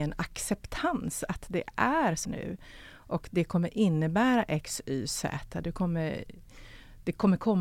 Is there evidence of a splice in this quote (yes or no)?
yes